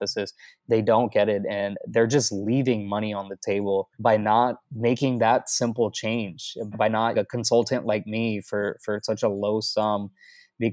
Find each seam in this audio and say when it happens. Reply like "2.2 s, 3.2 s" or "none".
3.9 s, 4.6 s, 6.7 s, 7.1 s